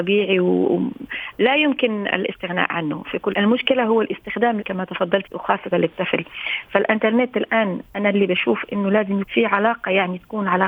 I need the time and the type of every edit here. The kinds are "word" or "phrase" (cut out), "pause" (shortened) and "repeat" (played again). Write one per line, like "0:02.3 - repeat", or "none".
0:03.3 - word
0:04.6 - word
0:05.2 - word
0:05.7 - word
0:09.2 - word